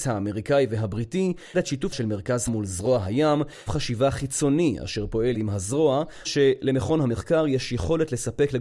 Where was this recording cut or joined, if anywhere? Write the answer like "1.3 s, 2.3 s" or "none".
1.5 s, 1.9 s, 2.5 s, 3.7 s, 5.3 s, 6.2 s